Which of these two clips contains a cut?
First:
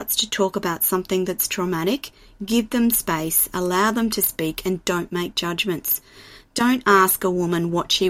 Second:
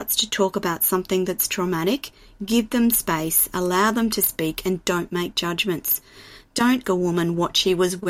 second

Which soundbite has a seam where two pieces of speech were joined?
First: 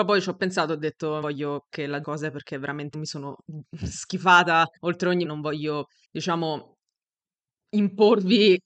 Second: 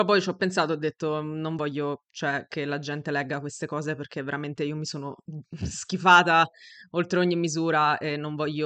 first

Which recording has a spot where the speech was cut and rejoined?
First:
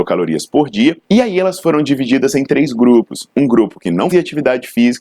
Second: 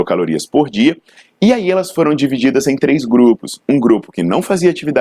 first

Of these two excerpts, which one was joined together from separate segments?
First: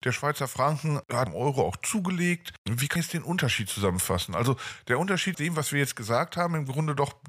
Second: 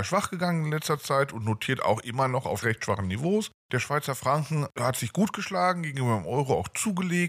first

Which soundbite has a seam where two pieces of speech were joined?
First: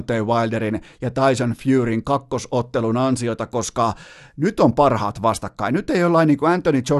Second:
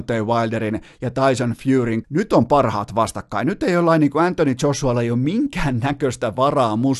second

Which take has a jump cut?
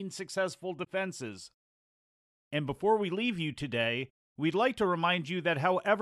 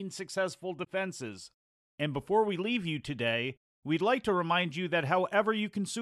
second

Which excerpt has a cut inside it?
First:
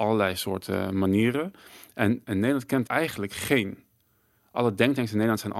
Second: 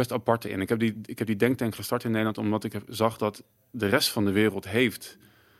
first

